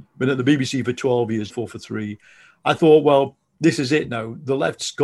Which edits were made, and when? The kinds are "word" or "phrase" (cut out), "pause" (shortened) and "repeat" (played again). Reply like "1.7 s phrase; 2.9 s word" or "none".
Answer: 1.5 s word